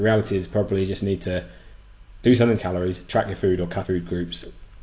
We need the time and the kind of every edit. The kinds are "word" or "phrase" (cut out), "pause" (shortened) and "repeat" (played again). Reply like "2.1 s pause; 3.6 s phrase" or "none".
2.6 s phrase; 3.8 s word